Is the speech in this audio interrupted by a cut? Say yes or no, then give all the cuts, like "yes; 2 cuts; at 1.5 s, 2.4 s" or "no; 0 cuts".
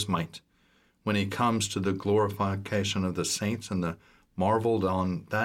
no; 0 cuts